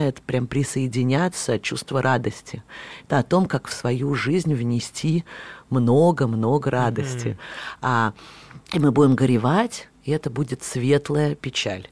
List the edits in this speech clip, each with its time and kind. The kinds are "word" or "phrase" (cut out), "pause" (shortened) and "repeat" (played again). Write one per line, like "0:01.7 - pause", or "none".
0:08.6 - pause